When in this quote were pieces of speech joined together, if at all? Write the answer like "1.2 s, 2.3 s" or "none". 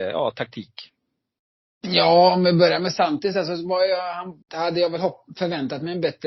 4.4 s